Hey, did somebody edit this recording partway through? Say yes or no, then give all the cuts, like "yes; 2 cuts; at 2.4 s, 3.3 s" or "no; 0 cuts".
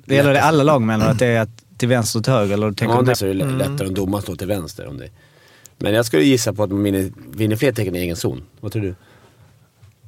yes; 1 cut; at 3.1 s